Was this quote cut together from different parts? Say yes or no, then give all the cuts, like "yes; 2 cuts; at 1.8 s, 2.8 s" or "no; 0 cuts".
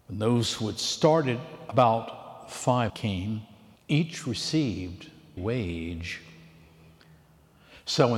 yes; 3 cuts; at 2.9 s, 3.8 s, 5.4 s